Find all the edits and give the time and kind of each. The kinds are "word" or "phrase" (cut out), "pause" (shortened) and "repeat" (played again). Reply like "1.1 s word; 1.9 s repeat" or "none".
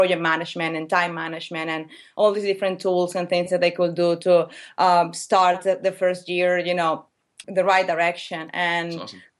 7.4 s word